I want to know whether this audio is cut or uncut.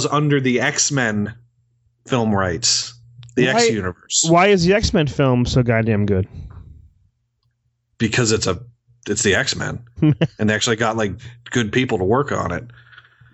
uncut